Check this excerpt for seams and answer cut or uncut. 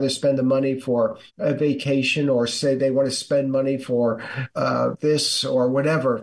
cut